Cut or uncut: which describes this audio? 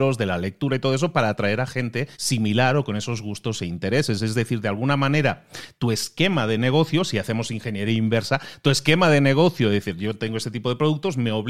cut